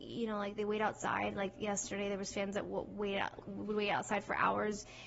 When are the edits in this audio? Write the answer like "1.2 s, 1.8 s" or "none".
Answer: 3.4 s